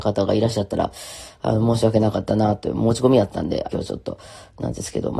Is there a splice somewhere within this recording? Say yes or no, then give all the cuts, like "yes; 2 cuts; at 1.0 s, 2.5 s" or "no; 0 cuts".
yes; 1 cut; at 3.7 s